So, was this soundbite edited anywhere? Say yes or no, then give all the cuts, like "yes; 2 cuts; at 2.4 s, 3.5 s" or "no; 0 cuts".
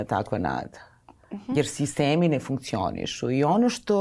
no; 0 cuts